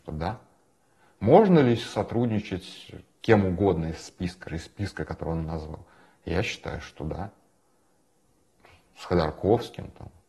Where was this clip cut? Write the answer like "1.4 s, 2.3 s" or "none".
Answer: 3.2 s, 4.5 s, 5.0 s